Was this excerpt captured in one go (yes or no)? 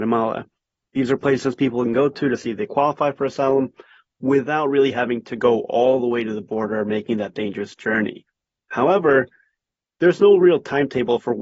yes